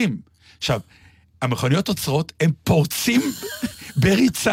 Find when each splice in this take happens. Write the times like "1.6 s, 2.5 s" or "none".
none